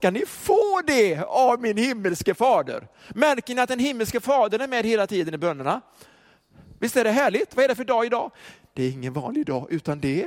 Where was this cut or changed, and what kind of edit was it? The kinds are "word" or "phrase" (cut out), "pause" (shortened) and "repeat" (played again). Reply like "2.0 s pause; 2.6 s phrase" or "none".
none